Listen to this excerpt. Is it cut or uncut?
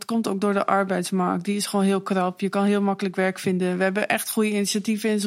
uncut